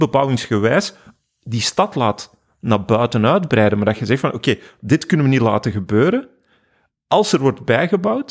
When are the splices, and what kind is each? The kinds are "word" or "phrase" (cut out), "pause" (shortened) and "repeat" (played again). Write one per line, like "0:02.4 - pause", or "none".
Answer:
none